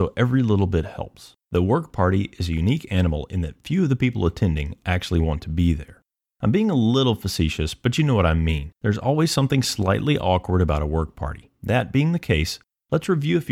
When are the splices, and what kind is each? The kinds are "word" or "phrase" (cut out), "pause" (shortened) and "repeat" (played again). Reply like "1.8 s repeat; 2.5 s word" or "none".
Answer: 1.4 s pause; 8.7 s pause; 11.5 s pause